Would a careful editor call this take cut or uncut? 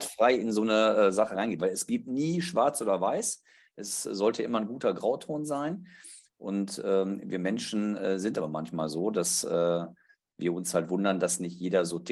uncut